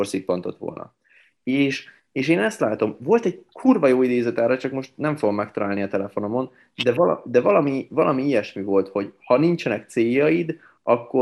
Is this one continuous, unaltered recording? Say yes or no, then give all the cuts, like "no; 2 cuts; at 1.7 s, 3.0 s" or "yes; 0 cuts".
yes; 0 cuts